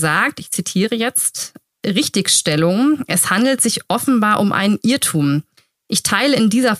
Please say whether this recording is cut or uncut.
uncut